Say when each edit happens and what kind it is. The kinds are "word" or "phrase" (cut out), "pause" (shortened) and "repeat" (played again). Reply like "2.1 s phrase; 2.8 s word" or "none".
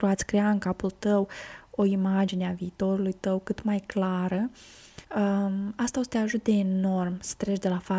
5.0 s pause